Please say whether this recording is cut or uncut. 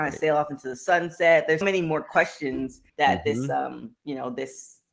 cut